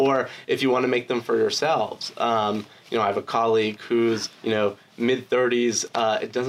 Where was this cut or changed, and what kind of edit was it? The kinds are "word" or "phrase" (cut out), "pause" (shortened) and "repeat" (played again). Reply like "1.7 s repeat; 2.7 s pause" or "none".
4.3 s pause